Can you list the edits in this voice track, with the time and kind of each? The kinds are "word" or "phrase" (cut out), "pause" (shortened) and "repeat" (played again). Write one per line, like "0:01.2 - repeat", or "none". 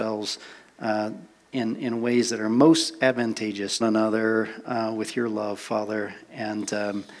0:03.8 - phrase